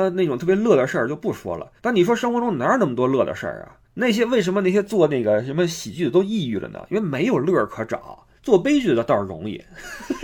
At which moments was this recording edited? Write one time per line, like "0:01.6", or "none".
0:01.8
0:03.8
0:08.4